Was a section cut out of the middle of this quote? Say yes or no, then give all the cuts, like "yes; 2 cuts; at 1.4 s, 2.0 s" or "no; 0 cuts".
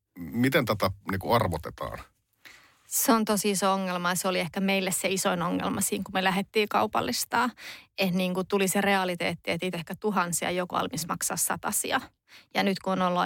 yes; 3 cuts; at 1.0 s, 9.7 s, 10.7 s